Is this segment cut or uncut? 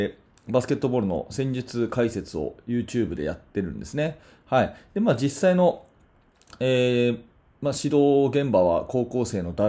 uncut